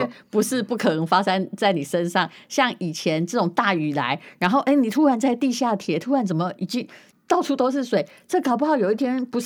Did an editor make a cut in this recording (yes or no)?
no